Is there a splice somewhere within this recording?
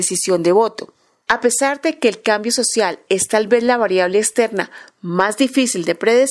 no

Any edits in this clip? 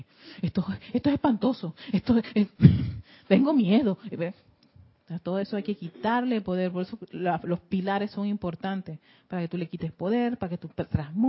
no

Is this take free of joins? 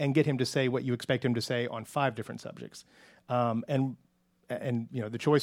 yes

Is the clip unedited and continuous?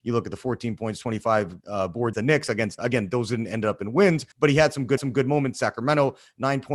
no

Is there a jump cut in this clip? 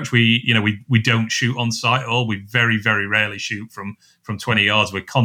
no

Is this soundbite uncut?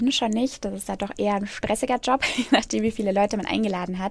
yes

